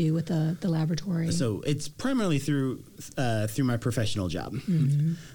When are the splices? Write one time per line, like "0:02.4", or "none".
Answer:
none